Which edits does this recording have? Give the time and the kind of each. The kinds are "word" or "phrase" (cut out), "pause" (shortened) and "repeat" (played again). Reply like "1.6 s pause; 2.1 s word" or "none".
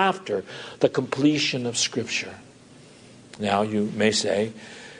none